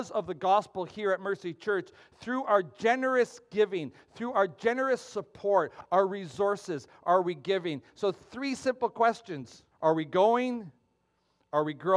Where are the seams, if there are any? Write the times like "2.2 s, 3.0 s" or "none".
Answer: 9.7 s